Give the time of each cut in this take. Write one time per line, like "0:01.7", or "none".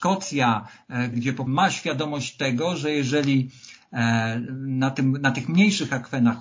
0:01.1
0:01.5

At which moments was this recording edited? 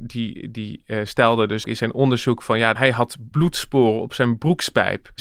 0:01.6
0:03.3

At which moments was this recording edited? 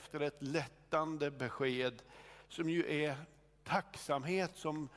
none

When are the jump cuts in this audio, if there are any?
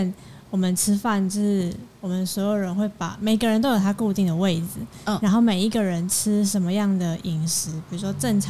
none

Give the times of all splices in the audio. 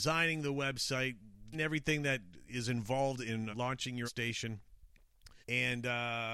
0:01.5
0:03.5
0:04.0
0:05.4

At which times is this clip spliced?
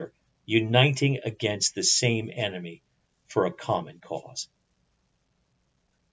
none

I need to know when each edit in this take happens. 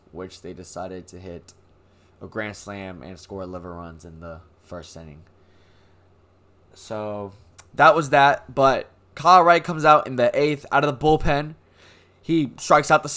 none

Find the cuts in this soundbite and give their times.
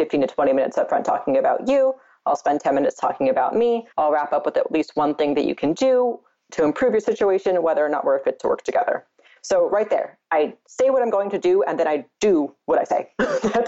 0:03.9

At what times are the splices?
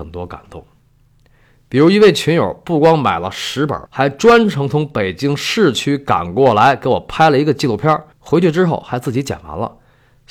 0:03.9
0:08.1

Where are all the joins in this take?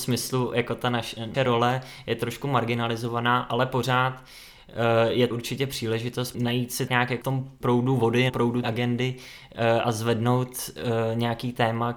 0:01.3
0:05.3
0:06.3
0:06.9
0:07.2
0:07.6
0:08.3
0:08.6

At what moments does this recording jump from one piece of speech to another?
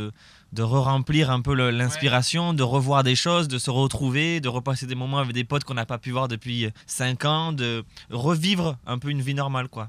0:06.8

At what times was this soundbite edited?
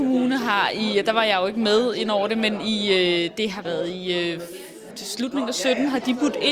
0:03.6

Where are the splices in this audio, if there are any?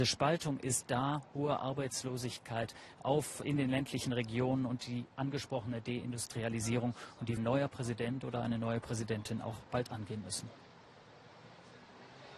0:03.4
0:07.4

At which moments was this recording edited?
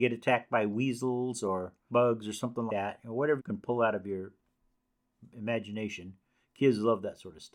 0:01.9
0:02.7
0:03.4

